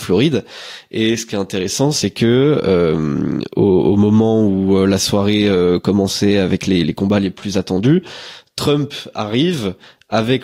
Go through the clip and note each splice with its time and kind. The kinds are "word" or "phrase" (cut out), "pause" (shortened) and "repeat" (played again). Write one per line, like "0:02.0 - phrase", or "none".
0:06.8 - word